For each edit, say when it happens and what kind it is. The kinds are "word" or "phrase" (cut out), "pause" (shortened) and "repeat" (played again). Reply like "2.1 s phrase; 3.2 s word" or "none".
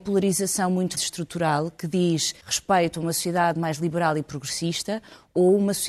1.0 s word; 2.4 s pause